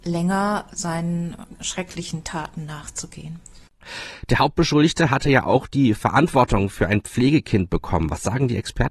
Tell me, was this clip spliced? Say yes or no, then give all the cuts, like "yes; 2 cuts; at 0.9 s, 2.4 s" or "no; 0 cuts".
no; 0 cuts